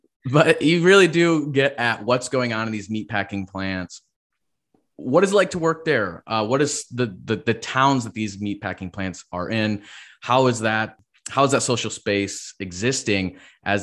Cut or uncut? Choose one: uncut